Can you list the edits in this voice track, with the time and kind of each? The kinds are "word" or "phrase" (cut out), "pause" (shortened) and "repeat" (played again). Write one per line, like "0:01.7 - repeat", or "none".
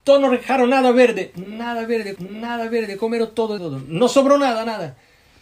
0:02.2 - repeat
0:03.6 - phrase